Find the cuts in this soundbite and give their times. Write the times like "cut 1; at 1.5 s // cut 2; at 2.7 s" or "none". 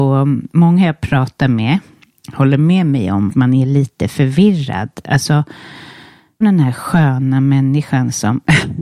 cut 1; at 3.3 s // cut 2; at 6.4 s